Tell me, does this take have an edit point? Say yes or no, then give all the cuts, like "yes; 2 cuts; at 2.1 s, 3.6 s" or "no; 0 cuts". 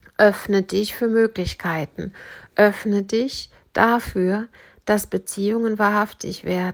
no; 0 cuts